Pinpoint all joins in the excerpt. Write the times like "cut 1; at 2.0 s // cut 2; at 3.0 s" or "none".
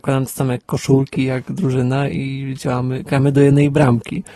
none